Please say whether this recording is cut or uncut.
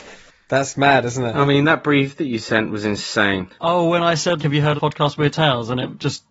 cut